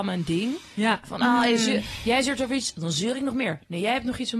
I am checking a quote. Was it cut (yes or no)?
no